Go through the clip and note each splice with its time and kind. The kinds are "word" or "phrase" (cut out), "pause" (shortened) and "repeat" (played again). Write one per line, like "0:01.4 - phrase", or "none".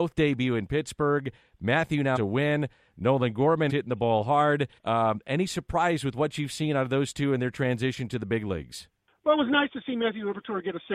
0:02.2 - word
0:03.7 - word
0:04.8 - pause